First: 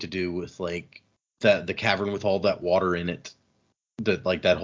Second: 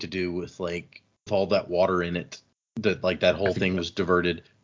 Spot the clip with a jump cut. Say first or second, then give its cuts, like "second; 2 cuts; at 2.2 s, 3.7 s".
second; 2 cuts; at 1.3 s, 2.5 s